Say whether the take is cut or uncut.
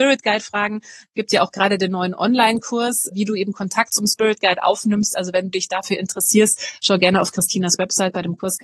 cut